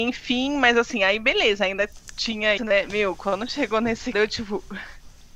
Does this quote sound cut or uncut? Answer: cut